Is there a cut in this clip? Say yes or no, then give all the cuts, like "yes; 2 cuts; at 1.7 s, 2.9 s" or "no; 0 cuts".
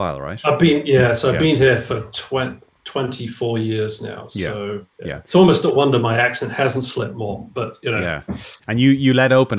yes; 3 cuts; at 2.8 s, 4.9 s, 8.6 s